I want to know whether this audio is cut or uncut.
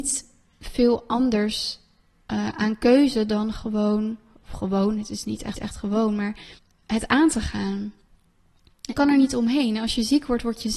cut